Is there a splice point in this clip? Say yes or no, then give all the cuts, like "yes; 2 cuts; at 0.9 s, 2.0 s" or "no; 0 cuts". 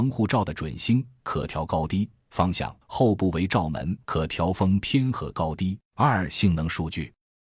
yes; 3 cuts; at 2.8 s, 4.0 s, 5.9 s